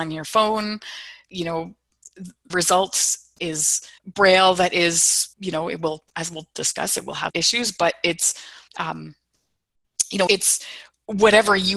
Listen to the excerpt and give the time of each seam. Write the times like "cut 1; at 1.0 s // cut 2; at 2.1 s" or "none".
cut 1; at 1.3 s // cut 2; at 2.5 s // cut 3; at 4.0 s // cut 4; at 5.3 s // cut 5; at 6.1 s // cut 6; at 7.3 s // cut 7; at 8.7 s // cut 8; at 10.3 s